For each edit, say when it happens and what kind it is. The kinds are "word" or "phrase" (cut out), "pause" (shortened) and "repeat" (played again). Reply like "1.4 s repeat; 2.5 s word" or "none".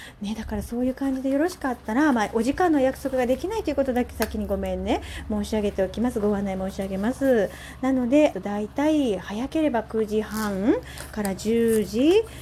8.3 s phrase